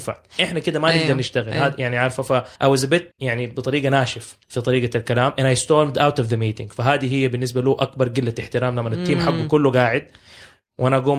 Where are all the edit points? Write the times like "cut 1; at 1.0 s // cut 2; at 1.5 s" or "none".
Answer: cut 1; at 2.6 s // cut 2; at 3.1 s // cut 3; at 4.4 s